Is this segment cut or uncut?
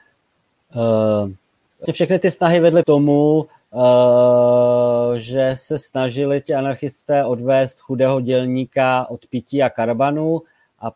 cut